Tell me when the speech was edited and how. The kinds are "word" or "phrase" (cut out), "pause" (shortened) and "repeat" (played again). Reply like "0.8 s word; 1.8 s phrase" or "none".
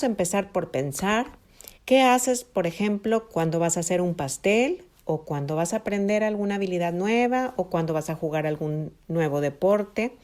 1.7 s pause